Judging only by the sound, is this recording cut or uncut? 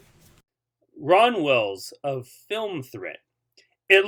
uncut